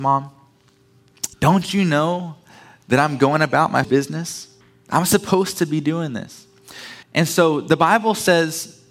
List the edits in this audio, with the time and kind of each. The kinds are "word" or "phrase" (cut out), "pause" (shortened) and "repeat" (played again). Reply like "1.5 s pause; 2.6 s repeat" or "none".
1.3 s pause; 3.8 s word; 4.6 s pause; 7.0 s pause